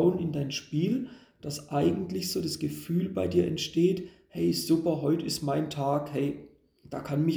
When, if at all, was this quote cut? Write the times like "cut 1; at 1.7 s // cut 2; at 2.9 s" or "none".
none